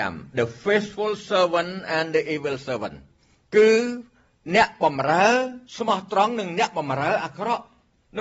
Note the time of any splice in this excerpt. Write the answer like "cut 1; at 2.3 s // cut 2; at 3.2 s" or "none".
cut 1; at 3.2 s // cut 2; at 5.7 s